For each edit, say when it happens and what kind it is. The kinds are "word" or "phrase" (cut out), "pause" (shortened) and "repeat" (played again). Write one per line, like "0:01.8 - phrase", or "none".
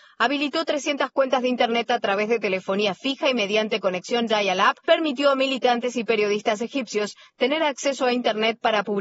0:04.8 - word